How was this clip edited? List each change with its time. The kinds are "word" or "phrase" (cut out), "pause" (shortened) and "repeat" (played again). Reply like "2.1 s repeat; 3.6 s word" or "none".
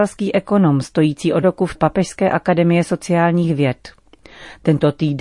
1.4 s word; 1.7 s word